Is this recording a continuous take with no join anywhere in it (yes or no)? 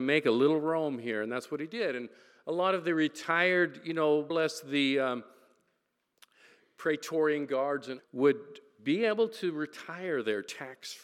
no